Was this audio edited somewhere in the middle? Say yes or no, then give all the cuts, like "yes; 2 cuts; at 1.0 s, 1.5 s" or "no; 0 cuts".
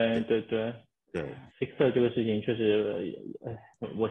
yes; 1 cut; at 1.5 s